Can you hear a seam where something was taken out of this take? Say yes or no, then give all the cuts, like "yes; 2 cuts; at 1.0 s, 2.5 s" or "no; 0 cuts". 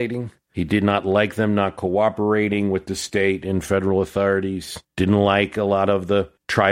yes; 1 cut; at 4.8 s